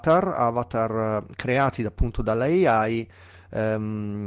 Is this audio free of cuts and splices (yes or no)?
yes